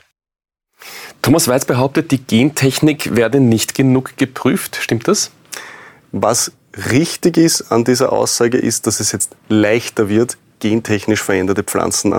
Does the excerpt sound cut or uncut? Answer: uncut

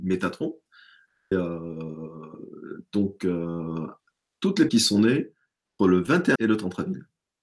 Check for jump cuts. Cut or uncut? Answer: cut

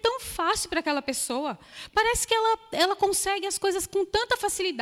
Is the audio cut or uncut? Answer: uncut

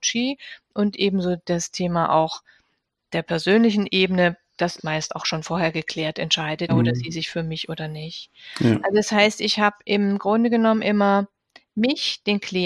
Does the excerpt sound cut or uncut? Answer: cut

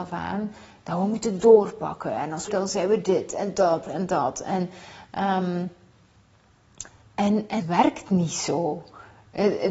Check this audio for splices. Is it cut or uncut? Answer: cut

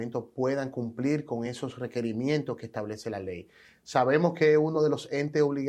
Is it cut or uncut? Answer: uncut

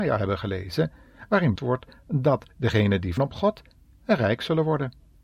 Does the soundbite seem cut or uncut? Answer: cut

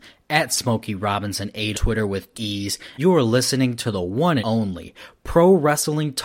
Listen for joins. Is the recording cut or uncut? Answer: cut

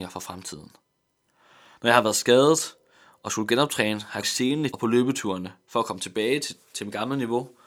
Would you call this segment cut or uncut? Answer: cut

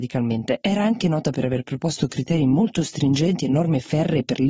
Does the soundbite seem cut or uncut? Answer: uncut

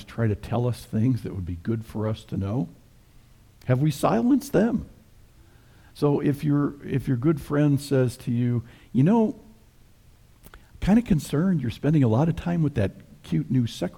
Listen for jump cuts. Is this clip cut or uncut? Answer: uncut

